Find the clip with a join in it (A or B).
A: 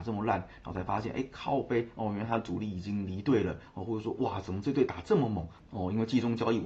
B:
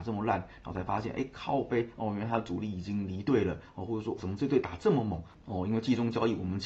B